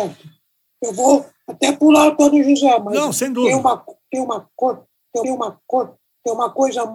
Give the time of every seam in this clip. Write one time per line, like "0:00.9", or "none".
0:05.2